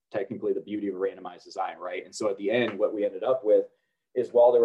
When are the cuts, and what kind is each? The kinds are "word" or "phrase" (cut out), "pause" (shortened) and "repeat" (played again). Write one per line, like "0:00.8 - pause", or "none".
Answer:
none